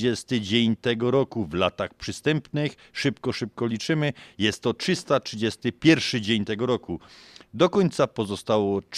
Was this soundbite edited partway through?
no; 0 cuts

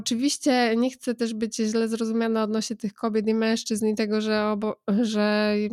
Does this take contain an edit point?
no; 0 cuts

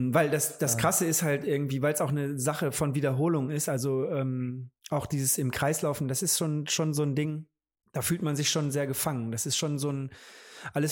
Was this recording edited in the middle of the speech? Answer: yes; 1 cut; at 7.8 s

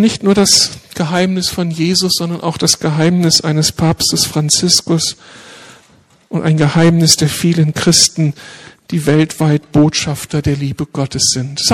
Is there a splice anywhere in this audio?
no; 0 cuts

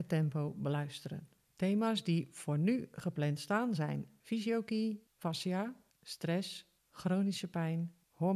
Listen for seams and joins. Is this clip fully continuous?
yes; 0 cuts

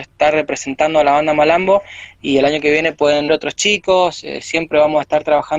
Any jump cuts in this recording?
yes; 1 cut; at 3.3 s

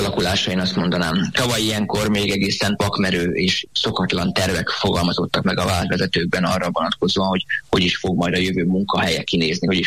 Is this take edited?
no; 0 cuts

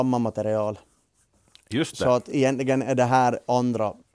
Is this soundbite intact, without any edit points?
yes; 0 cuts

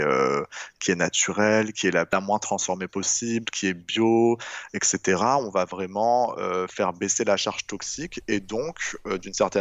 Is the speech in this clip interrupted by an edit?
no; 0 cuts

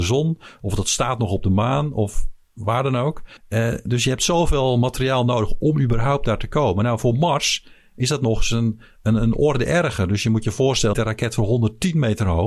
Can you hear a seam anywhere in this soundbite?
yes; 2 cuts; at 3.4 s, 10.9 s

